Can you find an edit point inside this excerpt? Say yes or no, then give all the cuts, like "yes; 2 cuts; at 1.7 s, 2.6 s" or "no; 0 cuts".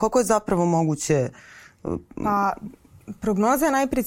no; 0 cuts